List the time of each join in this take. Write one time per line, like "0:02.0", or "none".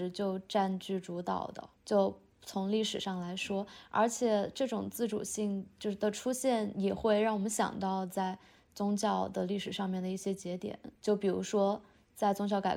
0:01.8
0:11.0